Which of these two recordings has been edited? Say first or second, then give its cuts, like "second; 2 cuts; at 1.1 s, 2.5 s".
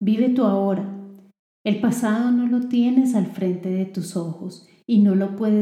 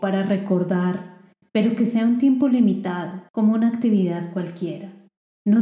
second; 1 cut; at 3.3 s